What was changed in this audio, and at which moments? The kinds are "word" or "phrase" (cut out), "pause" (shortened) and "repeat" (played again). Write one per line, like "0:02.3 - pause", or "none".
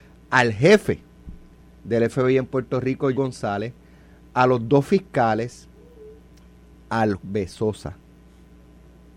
0:03.1 - word
0:07.1 - word